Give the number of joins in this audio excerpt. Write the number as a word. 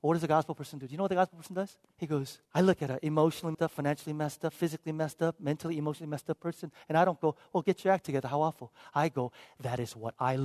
three